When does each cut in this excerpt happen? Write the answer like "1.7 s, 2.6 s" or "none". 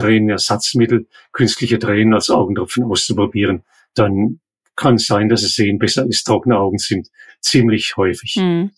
none